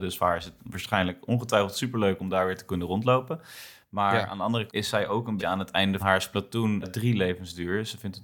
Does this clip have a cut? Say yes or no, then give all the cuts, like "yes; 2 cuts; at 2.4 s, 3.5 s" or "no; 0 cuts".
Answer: yes; 4 cuts; at 4.7 s, 5.4 s, 6.0 s, 6.8 s